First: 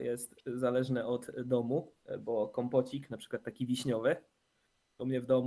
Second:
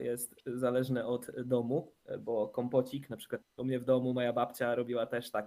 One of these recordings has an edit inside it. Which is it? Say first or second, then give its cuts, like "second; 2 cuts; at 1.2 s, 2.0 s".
second; 1 cut; at 3.4 s